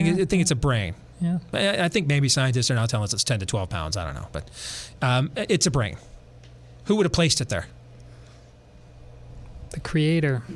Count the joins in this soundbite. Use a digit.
0